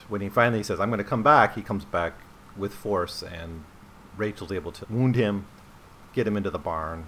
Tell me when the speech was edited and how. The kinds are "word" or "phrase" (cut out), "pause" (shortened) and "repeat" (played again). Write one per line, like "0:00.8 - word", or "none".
0:04.8 - word